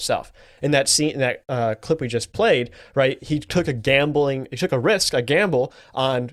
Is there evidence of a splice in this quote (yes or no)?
no